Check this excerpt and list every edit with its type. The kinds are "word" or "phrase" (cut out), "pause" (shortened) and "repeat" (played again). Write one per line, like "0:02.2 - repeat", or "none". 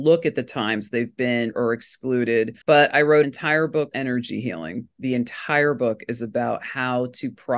0:01.5 - word
0:02.6 - pause
0:03.2 - word
0:03.9 - word
0:05.0 - word